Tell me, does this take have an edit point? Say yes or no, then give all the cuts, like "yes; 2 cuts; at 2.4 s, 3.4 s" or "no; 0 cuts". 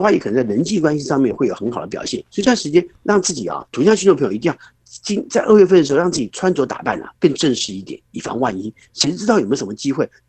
yes; 1 cut; at 2.3 s